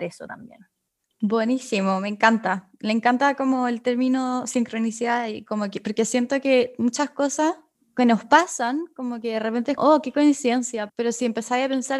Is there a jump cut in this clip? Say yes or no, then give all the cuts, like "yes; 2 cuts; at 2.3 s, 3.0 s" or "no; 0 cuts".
yes; 4 cuts; at 1.0 s, 7.7 s, 9.8 s, 10.9 s